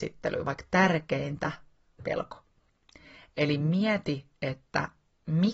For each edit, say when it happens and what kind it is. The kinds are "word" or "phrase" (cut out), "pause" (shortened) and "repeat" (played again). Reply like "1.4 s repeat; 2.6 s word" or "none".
2.0 s phrase

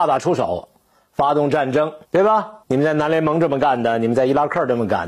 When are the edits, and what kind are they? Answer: 2.0 s pause; 2.6 s pause

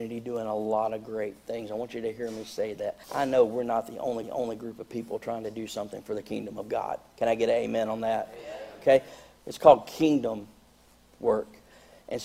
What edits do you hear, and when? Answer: 3.0 s pause; 4.2 s repeat

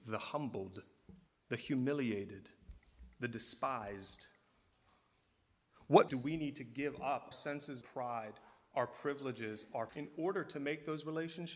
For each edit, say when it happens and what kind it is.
1.3 s pause; 6.1 s word; 7.3 s word; 7.8 s word; 9.9 s word

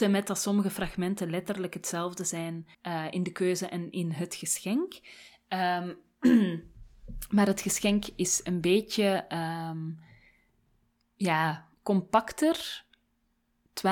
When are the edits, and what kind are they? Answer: 2.7 s pause; 11.8 s pause

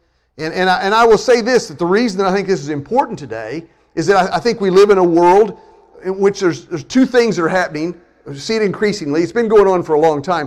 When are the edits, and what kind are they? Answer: none

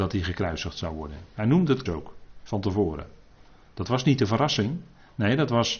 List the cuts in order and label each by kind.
1.9 s word

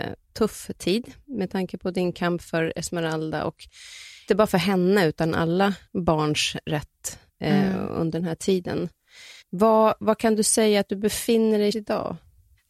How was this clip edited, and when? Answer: 4.3 s word; 5.9 s pause; 7.3 s pause; 9.4 s pause; 11.7 s word

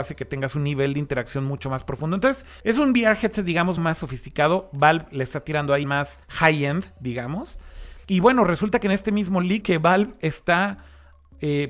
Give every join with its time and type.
2.6 s pause; 3.8 s word; 5.8 s word; 6.2 s pause; 8.0 s pause; 9.6 s word

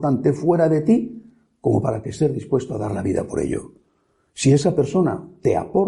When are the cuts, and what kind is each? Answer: none

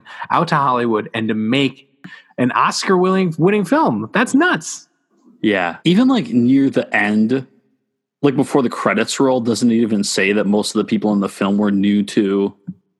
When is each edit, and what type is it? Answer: 5.8 s pause

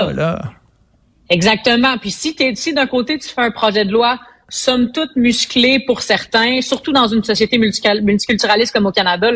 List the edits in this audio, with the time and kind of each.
none

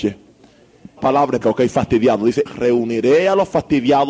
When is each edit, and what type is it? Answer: 1.0 s word; 1.4 s word; 2.5 s word

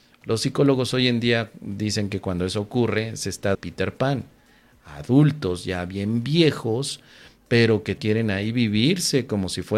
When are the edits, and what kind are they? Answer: 3.5 s phrase; 8.0 s word

